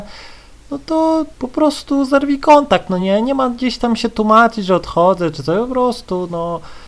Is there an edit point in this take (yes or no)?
no